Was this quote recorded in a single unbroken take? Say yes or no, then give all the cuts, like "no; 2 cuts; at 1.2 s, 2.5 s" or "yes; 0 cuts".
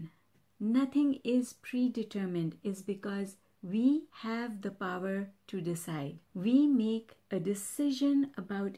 no; 1 cut; at 4.1 s